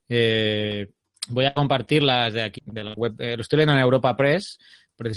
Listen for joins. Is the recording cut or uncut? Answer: cut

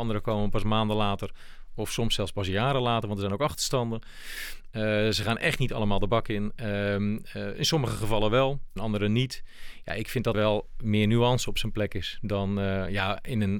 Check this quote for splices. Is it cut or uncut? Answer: cut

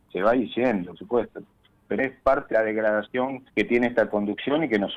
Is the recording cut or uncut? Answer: cut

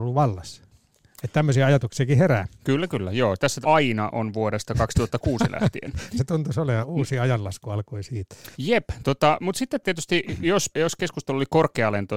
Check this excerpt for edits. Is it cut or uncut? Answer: cut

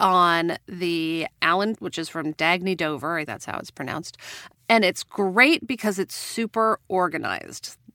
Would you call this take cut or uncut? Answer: cut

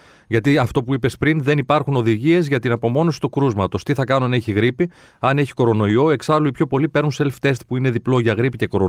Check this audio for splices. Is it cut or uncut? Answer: uncut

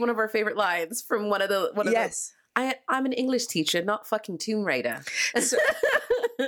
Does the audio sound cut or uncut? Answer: uncut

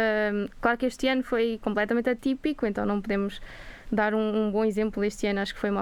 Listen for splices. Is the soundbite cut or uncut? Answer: uncut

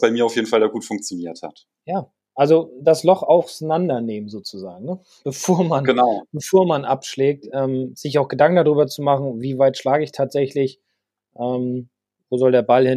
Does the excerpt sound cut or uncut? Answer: uncut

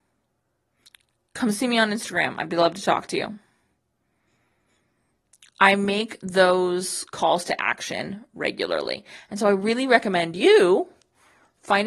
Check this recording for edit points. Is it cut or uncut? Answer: uncut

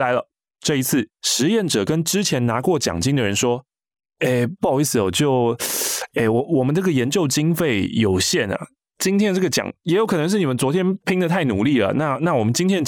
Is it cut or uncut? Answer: uncut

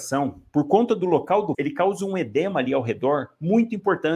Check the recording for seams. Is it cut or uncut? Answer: cut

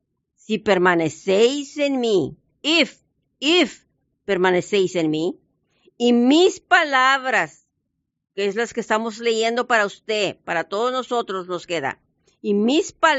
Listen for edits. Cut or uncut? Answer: uncut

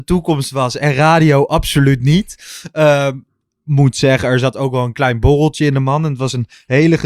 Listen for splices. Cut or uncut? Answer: uncut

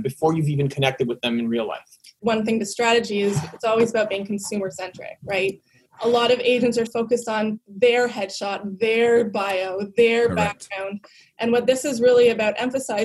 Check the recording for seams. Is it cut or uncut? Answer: cut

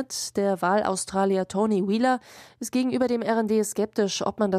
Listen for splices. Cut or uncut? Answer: uncut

